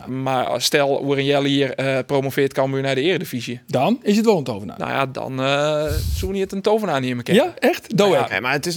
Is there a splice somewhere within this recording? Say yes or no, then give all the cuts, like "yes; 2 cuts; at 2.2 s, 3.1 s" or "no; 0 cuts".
no; 0 cuts